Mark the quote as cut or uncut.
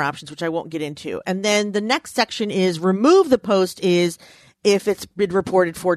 uncut